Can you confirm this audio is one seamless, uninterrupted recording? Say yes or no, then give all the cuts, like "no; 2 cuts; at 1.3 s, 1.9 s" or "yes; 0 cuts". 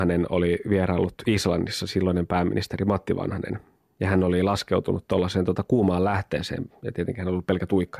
yes; 0 cuts